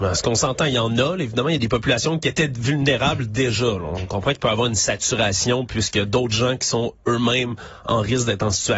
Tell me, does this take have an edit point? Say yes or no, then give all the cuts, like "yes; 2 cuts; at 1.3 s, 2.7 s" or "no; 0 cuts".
no; 0 cuts